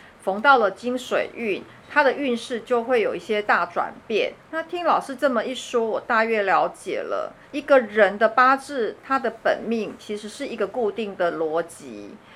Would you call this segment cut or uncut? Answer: cut